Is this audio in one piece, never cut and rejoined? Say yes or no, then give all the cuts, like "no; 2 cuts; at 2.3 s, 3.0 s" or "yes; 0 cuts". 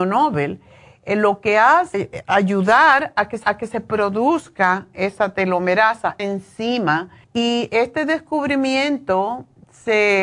no; 4 cuts; at 1.9 s, 3.4 s, 6.2 s, 7.2 s